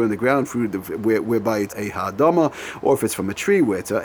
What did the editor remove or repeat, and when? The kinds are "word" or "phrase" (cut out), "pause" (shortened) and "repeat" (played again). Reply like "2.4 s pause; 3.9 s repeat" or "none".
1.7 s word

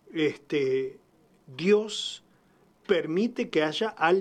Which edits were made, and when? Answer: none

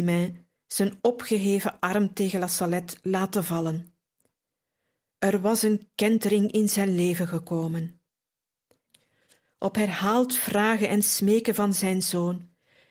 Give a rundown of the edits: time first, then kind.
none

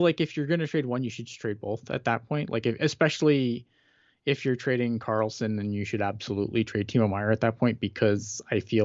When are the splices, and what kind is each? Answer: none

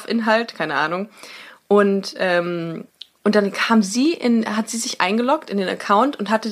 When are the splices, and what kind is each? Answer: 2.9 s pause

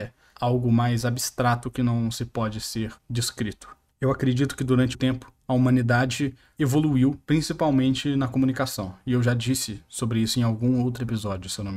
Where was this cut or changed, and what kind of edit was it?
3.0 s pause; 4.9 s word

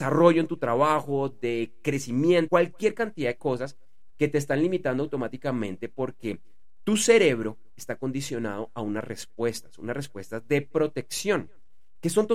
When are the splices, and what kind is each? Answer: 2.5 s word

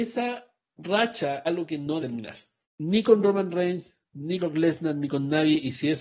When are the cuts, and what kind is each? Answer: 1.4 s word; 2.0 s word; 2.6 s pause; 4.4 s word

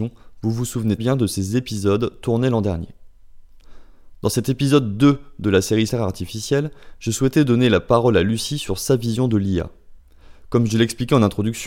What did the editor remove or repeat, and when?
1.0 s word; 5.9 s phrase

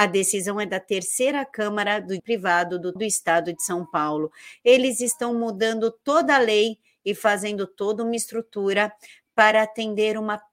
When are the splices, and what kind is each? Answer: 2.2 s word; 3.0 s word

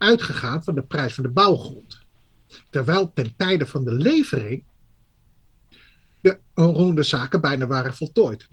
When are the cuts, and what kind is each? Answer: none

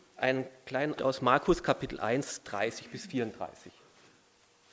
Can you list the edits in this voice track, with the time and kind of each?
1.0 s word

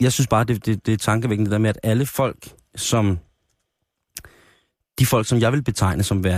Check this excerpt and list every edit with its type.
none

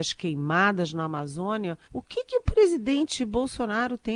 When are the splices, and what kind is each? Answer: 1.8 s pause

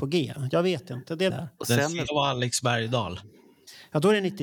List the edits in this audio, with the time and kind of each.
1.3 s word; 1.6 s word; 2.1 s word

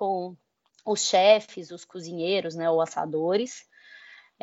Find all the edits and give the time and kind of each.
none

